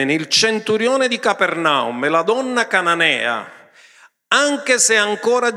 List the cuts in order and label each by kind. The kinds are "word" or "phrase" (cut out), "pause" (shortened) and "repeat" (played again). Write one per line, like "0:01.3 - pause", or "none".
none